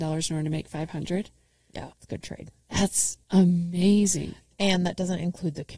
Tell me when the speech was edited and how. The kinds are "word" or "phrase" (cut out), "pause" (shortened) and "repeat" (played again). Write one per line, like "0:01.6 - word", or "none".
0:01.9 - pause
0:03.2 - pause